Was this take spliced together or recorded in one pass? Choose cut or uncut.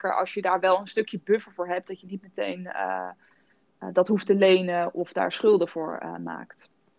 uncut